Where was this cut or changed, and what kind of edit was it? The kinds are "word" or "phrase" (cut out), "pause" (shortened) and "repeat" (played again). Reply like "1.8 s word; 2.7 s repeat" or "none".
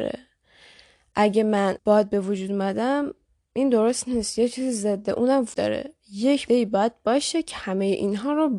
1.8 s word; 5.5 s word; 6.5 s word